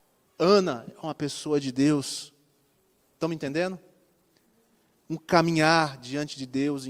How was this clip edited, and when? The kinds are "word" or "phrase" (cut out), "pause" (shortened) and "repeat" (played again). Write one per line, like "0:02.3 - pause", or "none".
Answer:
none

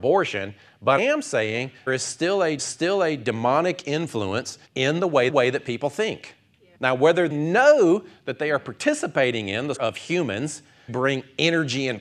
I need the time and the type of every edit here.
0:01.0 - word
0:01.9 - phrase
0:02.6 - repeat
0:04.7 - pause
0:05.3 - repeat
0:06.8 - pause
0:07.3 - word
0:09.8 - word
0:10.9 - word

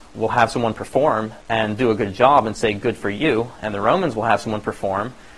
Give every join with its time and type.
0:01.4 - pause

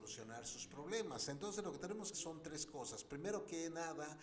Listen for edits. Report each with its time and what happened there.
0:02.1 - phrase

